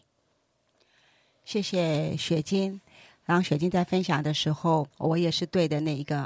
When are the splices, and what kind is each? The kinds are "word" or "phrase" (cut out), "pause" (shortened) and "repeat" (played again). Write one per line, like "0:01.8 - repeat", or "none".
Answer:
0:04.9 - pause